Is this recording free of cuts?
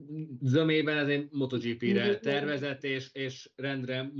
yes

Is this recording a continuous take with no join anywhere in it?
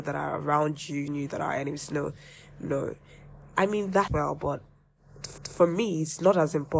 no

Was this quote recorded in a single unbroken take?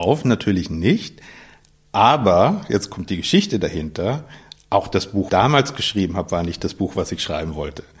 no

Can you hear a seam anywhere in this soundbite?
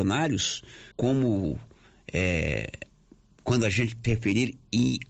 yes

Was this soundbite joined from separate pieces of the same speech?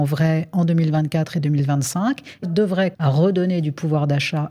yes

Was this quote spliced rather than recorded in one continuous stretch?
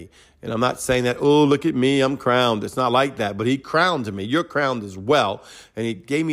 no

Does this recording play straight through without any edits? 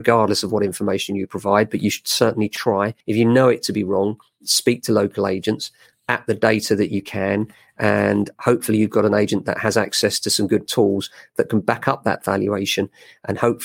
no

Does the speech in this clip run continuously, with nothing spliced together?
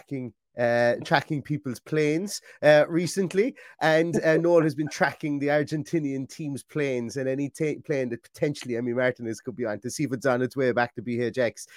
yes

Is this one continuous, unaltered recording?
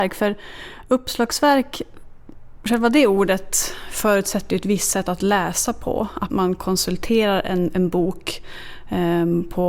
no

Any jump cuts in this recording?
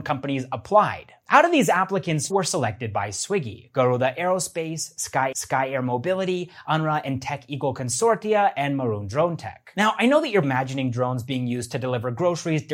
yes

